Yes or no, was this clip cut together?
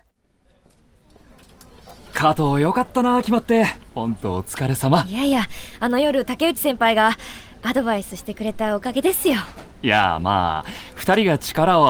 yes